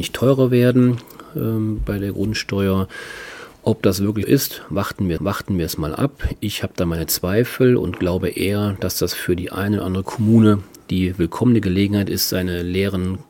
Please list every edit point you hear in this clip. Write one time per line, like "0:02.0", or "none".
0:04.2
0:05.2